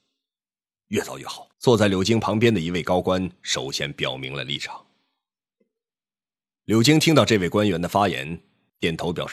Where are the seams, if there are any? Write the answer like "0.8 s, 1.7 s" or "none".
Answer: 1.5 s